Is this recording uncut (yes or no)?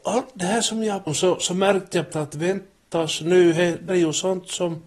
no